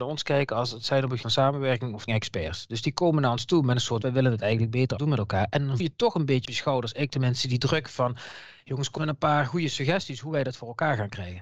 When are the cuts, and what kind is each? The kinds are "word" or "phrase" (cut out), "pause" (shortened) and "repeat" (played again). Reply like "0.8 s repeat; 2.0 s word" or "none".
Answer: 1.2 s word; 2.1 s word; 4.0 s word; 5.0 s word; 5.8 s word; 6.4 s word; 9.0 s word